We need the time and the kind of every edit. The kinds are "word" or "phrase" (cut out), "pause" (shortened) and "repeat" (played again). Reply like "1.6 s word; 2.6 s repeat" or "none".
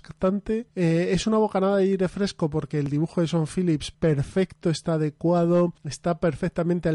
3.9 s phrase